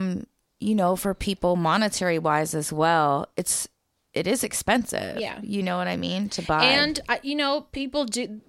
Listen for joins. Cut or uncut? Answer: uncut